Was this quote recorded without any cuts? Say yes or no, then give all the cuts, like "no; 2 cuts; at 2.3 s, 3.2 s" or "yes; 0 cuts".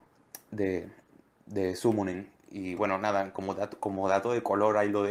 yes; 0 cuts